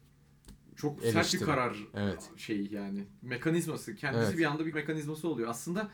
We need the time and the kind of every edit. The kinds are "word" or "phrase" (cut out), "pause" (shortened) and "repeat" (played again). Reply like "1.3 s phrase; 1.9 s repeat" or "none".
4.7 s word